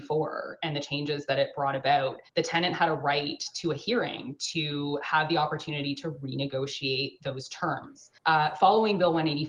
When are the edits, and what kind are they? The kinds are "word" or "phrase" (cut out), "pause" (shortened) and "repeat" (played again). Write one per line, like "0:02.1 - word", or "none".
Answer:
0:02.3 - pause
0:08.2 - pause